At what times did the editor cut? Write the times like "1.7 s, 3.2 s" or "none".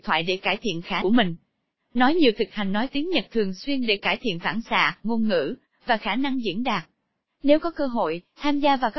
1.0 s